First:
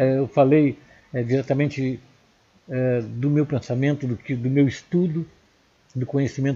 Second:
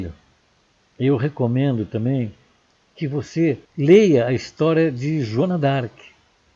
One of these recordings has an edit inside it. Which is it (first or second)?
second